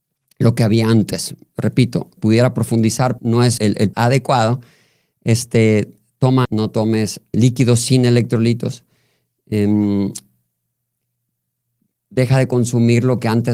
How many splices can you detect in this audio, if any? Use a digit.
6